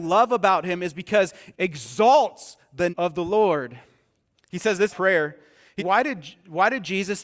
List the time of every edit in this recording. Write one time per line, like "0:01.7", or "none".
0:01.5
0:02.9
0:04.9
0:05.8